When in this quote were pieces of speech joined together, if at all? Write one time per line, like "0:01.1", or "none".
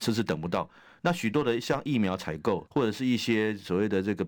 0:02.7